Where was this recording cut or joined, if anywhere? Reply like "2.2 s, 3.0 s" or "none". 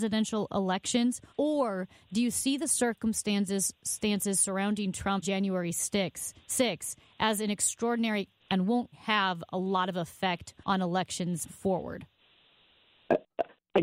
1.3 s, 5.2 s, 8.4 s, 8.9 s, 10.6 s, 11.5 s